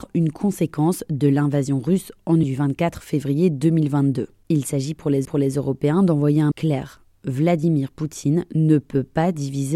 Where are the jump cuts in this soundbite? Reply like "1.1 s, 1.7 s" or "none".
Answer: 2.4 s, 5.2 s, 6.5 s